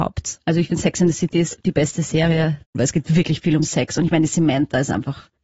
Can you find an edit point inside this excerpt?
no; 0 cuts

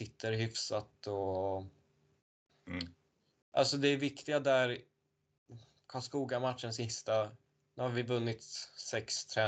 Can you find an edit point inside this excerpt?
no; 0 cuts

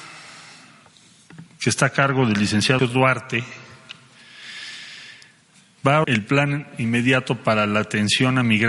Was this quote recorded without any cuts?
no; 2 cuts; at 2.8 s, 6.0 s

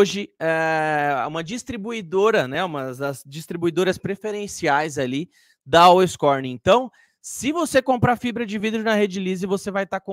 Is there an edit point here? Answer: no; 0 cuts

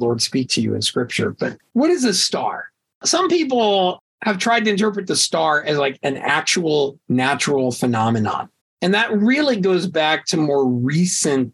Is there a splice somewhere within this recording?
yes; 1 cut; at 8.6 s

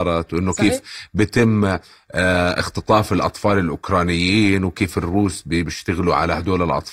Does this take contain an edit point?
no; 0 cuts

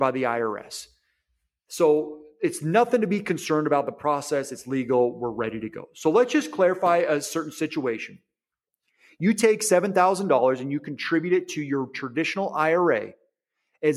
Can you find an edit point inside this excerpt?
no; 0 cuts

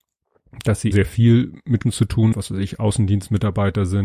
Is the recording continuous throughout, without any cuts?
no; 3 cuts; at 0.9 s, 1.8 s, 2.3 s

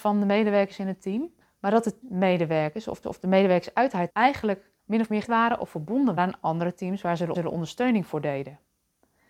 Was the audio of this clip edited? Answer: yes; 8 cuts; at 1.4 s, 2.0 s, 3.0 s, 4.1 s, 4.8 s, 5.2 s, 6.2 s, 7.3 s

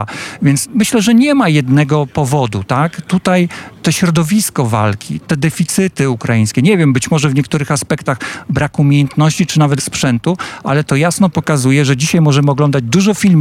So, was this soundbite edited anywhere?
yes; 1 cut; at 9.8 s

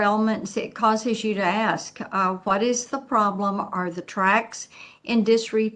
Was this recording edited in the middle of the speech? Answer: no; 0 cuts

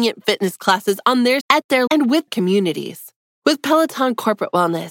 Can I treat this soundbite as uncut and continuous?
no; 3 cuts; at 1.4 s, 1.9 s, 2.3 s

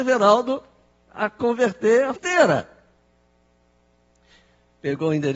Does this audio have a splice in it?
yes; 1 cut; at 2.2 s

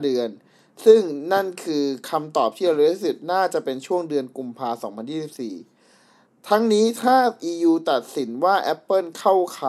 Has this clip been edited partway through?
no; 0 cuts

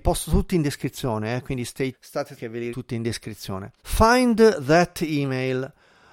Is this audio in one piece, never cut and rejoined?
no; 4 cuts; at 1.9 s, 2.4 s, 2.7 s, 3.8 s

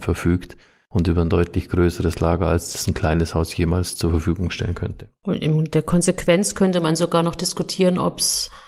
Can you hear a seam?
no; 0 cuts

